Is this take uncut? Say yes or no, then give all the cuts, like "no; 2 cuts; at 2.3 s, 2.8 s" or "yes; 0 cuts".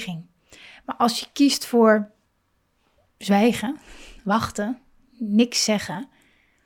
yes; 0 cuts